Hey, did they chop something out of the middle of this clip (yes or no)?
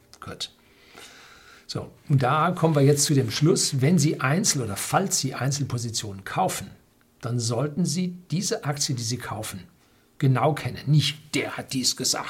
no